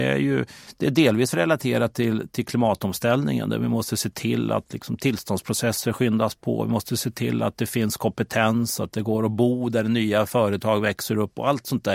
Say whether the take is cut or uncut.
uncut